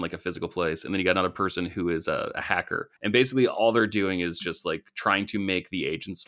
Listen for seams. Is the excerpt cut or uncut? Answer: cut